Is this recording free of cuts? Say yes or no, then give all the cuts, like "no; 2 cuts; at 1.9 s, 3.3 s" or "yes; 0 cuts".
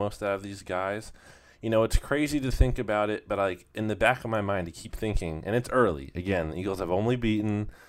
yes; 0 cuts